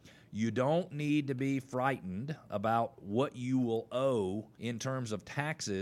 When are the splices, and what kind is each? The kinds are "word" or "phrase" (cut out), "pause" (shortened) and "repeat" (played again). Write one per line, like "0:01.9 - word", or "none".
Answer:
0:04.5 - pause